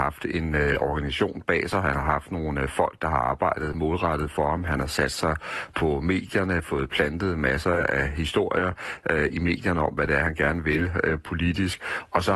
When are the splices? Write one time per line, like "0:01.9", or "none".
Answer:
none

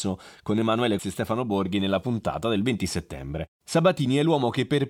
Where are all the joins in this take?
0:01.0
0:03.6

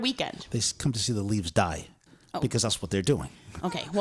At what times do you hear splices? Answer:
none

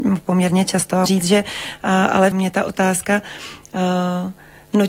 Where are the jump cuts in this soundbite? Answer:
0:01.1
0:02.3

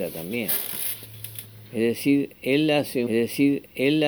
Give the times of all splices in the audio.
0:03.1

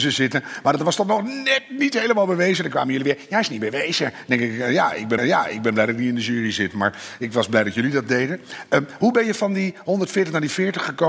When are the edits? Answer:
0:05.2

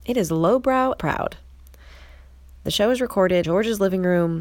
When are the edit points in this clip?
0:01.0
0:03.4

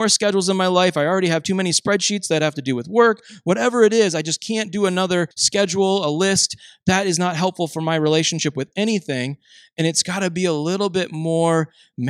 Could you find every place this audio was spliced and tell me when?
0:05.3

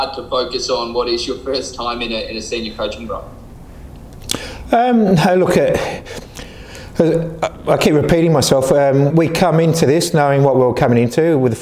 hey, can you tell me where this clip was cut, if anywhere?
0:09.1

